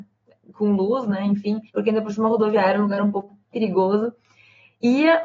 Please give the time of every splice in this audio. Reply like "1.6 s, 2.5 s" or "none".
1.7 s, 3.4 s